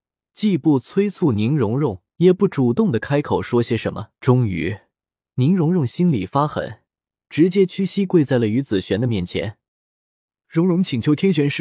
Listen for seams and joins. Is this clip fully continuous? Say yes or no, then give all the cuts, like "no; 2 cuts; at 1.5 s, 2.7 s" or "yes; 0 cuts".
no; 3 cuts; at 2.1 s, 4.2 s, 7.2 s